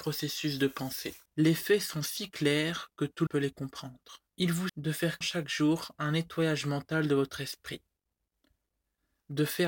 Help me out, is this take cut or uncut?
cut